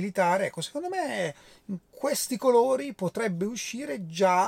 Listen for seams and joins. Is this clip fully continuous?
yes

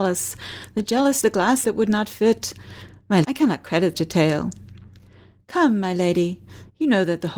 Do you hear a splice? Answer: yes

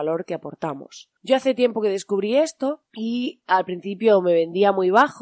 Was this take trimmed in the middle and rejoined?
yes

